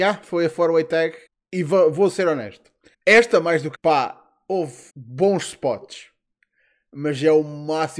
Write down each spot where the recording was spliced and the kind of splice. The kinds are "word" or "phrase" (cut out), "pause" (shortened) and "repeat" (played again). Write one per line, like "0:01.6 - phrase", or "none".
0:01.3 - pause
0:02.9 - pause
0:03.7 - phrase
0:04.9 - pause